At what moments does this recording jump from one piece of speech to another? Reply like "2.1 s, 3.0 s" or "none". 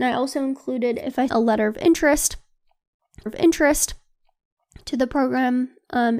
1.3 s, 3.3 s